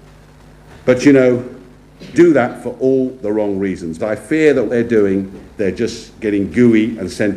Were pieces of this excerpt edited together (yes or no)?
yes